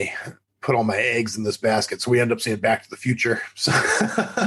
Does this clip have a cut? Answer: no; 0 cuts

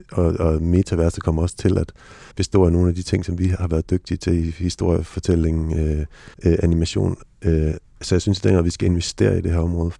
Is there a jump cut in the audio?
yes; 2 cuts; at 2.3 s, 6.3 s

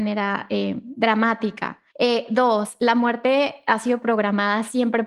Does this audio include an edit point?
yes; 1 cut; at 1.9 s

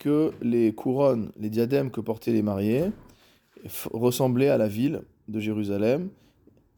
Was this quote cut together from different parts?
no; 0 cuts

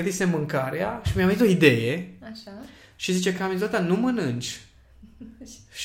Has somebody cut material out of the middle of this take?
no; 0 cuts

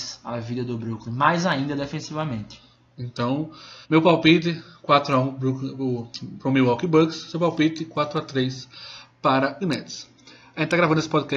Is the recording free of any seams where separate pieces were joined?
no; 2 cuts; at 3.8 s, 9.6 s

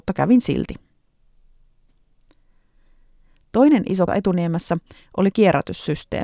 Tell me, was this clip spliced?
yes; 2 cuts; at 4.1 s, 5.3 s

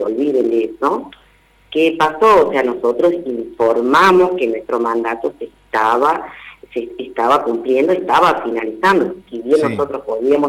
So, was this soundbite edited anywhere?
no; 0 cuts

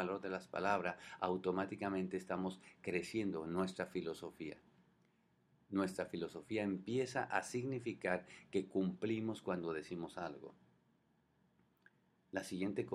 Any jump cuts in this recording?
no; 0 cuts

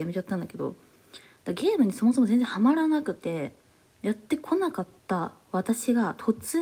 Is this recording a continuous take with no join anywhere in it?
yes; 0 cuts

